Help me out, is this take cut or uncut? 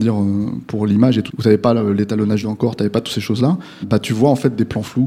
cut